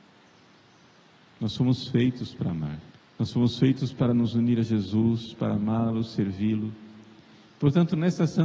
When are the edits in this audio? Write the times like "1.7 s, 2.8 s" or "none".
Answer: 2.9 s